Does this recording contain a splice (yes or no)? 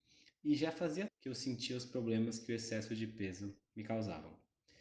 yes